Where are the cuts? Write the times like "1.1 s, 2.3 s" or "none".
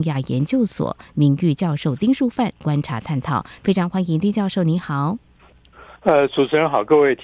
6.0 s

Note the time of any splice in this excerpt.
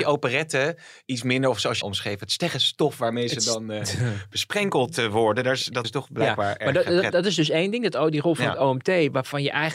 1.8 s, 5.8 s, 7.1 s

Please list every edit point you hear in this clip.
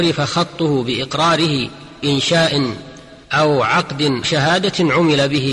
2.0 s, 3.2 s, 4.2 s

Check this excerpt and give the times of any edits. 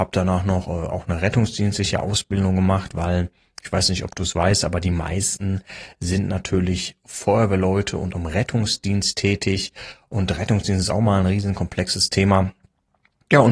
8.1 s

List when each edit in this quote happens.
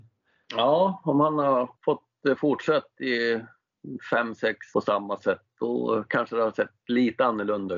1.8 s, 4.7 s

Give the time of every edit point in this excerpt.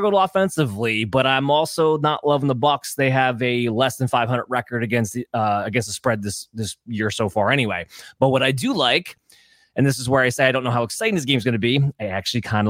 none

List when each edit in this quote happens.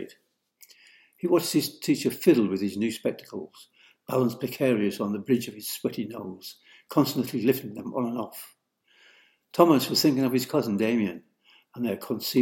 none

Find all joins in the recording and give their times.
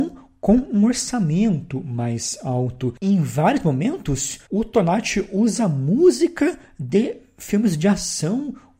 4.5 s

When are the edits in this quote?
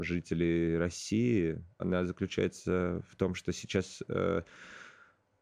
1.8 s

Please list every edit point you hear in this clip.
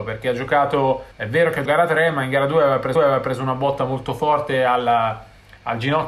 1.1 s, 1.7 s, 3.0 s

